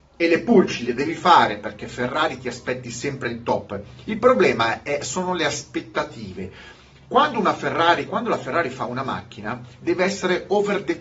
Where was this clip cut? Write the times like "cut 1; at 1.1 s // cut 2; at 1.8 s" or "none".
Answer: none